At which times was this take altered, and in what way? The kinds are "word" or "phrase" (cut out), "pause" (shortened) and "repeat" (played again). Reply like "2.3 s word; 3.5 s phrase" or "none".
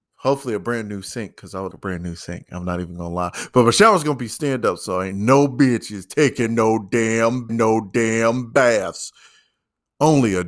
1.7 s word; 7.5 s repeat